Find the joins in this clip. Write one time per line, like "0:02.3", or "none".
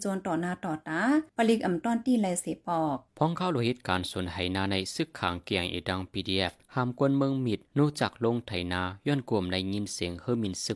0:01.3
0:03.1
0:06.6
0:07.7